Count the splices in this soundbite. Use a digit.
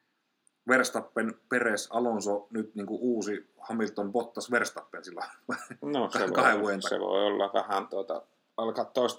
0